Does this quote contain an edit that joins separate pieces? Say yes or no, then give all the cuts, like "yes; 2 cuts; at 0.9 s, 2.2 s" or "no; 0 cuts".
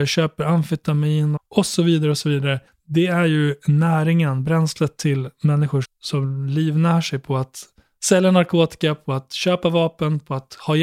yes; 3 cuts; at 1.4 s, 2.7 s, 5.8 s